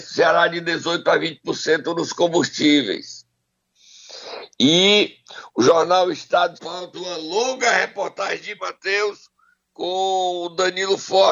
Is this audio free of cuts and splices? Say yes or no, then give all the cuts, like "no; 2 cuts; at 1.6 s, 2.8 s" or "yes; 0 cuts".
no; 4 cuts; at 6.6 s, 6.9 s, 8.6 s, 9.5 s